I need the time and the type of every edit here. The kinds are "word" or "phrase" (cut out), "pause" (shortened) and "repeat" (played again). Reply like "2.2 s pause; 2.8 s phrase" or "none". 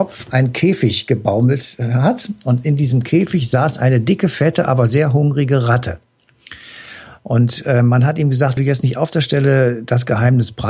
8.6 s word